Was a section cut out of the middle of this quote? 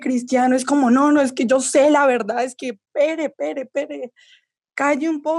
no; 0 cuts

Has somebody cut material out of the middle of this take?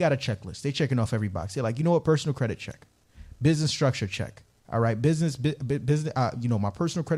no; 0 cuts

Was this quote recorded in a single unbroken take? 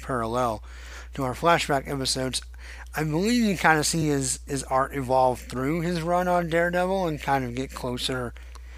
yes; 0 cuts

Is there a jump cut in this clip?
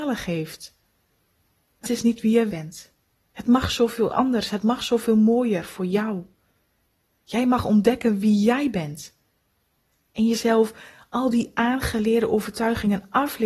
yes; 2 cuts; at 1.8 s, 2.5 s

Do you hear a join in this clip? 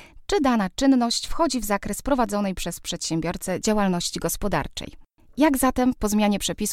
no; 0 cuts

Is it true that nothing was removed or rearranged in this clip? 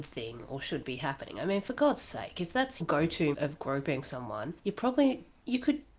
no; 3 cuts; at 2.8 s, 3.3 s, 4.6 s

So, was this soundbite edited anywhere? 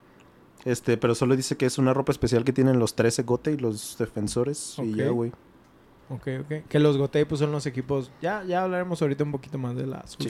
no; 0 cuts

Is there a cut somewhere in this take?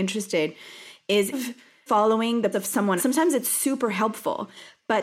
yes; 4 cuts; at 1.3 s, 1.9 s, 2.5 s, 3.0 s

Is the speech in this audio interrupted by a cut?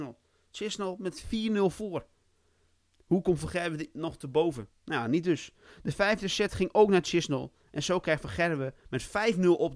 no; 0 cuts

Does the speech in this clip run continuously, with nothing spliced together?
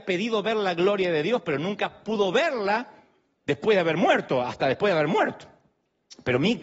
yes; 0 cuts

